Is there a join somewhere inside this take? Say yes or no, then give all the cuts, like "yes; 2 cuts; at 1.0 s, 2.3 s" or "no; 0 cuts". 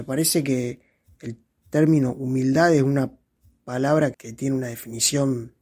yes; 1 cut; at 4.1 s